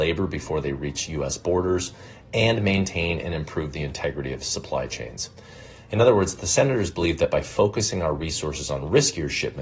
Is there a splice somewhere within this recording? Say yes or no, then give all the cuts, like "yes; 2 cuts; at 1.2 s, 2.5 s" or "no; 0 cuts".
no; 0 cuts